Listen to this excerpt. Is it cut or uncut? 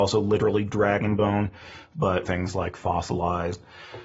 cut